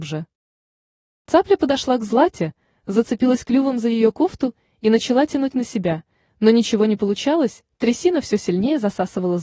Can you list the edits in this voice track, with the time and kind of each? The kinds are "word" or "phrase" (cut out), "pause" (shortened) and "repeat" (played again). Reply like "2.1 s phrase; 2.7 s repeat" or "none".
none